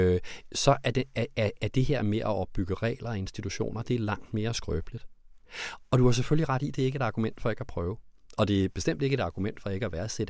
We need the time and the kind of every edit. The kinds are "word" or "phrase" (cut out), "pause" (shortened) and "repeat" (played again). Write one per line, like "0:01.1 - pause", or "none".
none